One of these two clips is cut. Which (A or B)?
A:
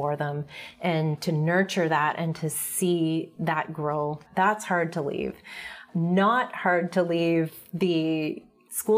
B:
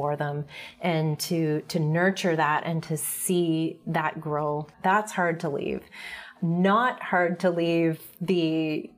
A